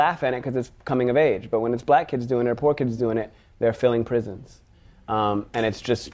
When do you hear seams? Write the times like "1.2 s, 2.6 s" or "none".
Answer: none